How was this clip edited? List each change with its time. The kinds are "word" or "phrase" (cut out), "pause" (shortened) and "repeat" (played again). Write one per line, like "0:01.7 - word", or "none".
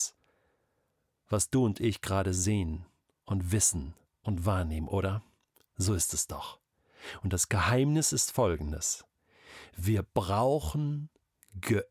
none